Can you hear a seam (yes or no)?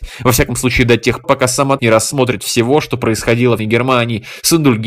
yes